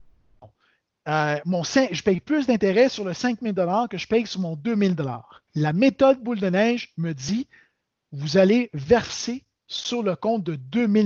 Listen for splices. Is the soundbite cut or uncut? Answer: cut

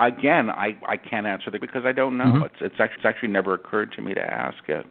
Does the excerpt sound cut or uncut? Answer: cut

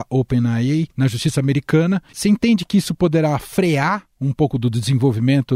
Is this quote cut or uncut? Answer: cut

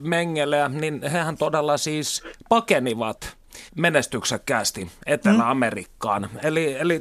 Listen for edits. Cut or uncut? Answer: cut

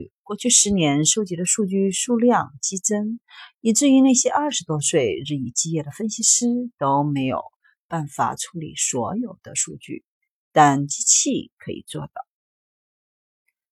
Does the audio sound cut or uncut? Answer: uncut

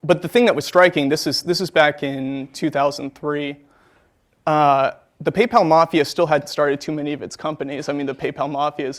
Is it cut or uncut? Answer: uncut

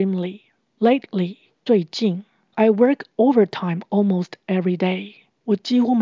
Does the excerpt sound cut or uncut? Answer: uncut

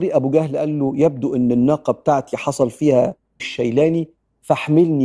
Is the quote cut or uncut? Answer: cut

